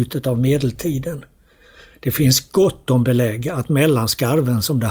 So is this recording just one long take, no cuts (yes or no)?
yes